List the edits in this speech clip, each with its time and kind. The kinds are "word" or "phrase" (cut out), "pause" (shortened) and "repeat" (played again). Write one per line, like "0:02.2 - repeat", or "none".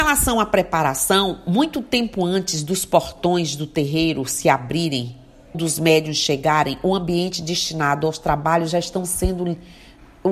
0:05.5 - word